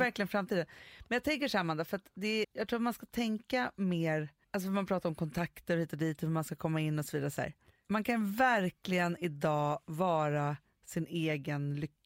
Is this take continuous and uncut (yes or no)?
no